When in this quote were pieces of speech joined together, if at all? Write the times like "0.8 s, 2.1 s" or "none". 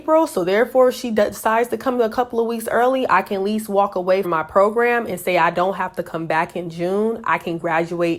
4.2 s